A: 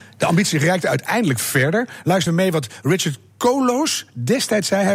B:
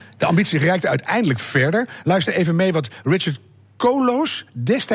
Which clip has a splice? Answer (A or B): A